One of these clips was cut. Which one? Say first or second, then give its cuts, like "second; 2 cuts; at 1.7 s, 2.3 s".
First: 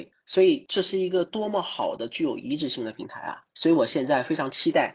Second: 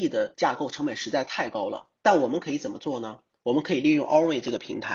first; 1 cut; at 3.5 s